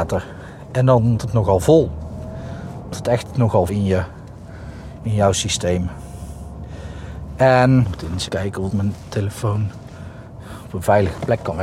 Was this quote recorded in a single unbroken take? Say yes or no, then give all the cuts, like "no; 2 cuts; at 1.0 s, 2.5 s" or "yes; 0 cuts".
no; 6 cuts; at 1.2 s, 2.9 s, 3.7 s, 7.8 s, 8.3 s, 8.7 s